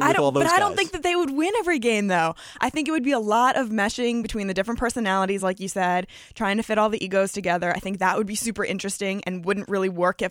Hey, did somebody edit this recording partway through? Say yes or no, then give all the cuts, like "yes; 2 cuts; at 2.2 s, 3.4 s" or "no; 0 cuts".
no; 0 cuts